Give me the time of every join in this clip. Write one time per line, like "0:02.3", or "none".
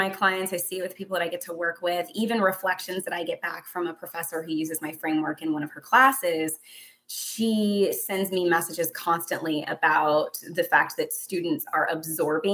none